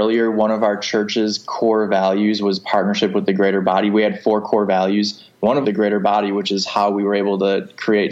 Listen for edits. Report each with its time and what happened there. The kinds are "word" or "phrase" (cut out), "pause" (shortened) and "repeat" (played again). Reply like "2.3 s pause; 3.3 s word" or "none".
5.6 s phrase